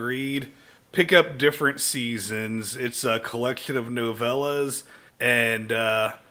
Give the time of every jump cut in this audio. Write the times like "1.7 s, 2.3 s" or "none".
5.1 s